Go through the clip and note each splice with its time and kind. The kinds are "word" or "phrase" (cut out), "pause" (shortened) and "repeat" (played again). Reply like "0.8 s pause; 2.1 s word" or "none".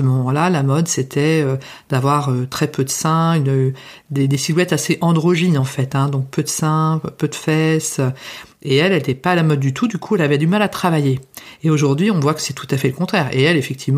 none